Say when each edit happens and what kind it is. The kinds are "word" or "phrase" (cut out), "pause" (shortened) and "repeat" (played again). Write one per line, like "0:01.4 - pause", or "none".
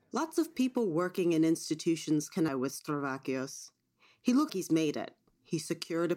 0:02.5 - word
0:04.5 - word